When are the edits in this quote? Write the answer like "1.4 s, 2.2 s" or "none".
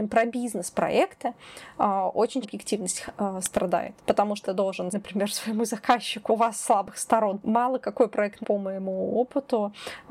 2.4 s, 4.0 s, 4.4 s, 4.9 s, 6.3 s, 7.4 s, 8.4 s

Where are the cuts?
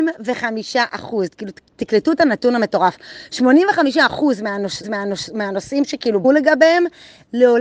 4.8 s, 6.2 s

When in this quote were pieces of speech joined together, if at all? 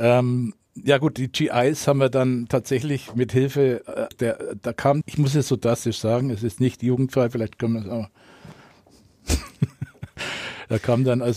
4.1 s, 5.0 s

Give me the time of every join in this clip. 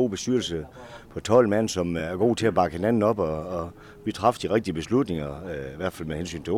none

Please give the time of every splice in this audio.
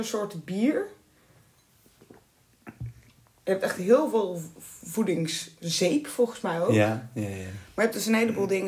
none

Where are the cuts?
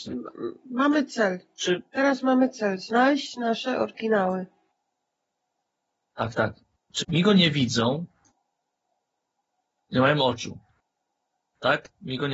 7.0 s

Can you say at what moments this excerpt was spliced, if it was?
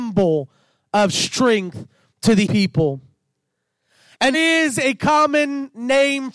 2.5 s, 4.3 s

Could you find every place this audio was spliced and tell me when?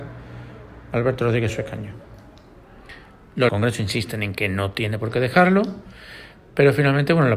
3.5 s

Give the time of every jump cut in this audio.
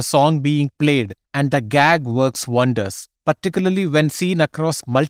1.2 s, 3.2 s

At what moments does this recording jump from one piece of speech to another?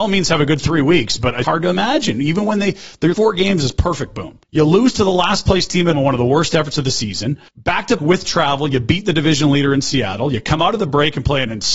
1.4 s, 3.1 s, 4.4 s, 5.9 s, 7.5 s, 8.0 s

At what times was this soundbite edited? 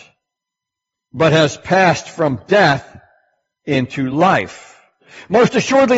none

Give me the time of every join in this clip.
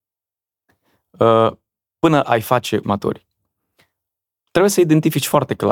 2.2 s, 2.8 s

